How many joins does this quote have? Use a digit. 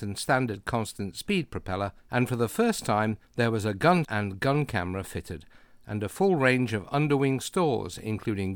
3